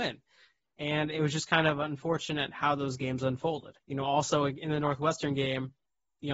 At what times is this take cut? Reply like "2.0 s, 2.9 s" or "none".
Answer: 3.8 s